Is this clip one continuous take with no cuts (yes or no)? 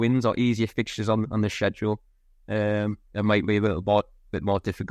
no